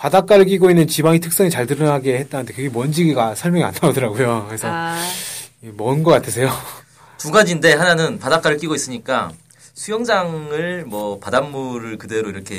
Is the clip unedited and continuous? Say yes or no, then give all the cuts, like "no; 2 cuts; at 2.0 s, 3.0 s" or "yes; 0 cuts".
yes; 0 cuts